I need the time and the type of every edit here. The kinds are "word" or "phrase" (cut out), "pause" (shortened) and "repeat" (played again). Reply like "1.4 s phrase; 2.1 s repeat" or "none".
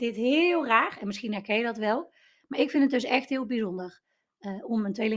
none

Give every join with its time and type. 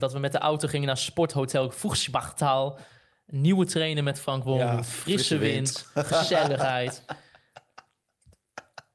none

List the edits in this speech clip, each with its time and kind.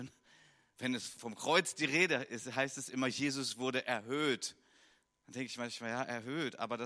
1.2 s word

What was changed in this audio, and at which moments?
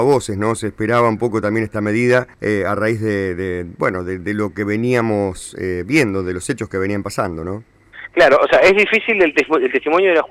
2.3 s pause

